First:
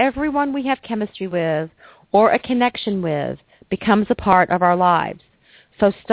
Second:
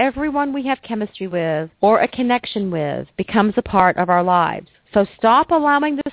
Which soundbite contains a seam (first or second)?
second